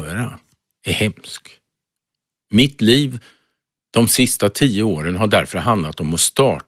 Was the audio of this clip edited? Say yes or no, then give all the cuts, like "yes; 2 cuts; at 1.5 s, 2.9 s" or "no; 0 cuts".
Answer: no; 0 cuts